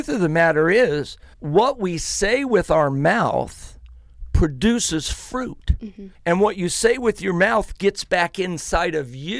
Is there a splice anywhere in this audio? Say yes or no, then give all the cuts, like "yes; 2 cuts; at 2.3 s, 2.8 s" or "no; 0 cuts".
yes; 2 cuts; at 1.3 s, 6.1 s